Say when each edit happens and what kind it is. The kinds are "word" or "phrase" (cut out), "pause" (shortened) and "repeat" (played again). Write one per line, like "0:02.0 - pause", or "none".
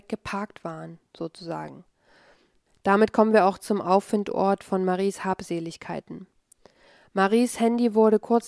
none